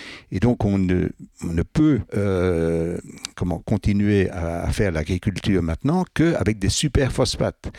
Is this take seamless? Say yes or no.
no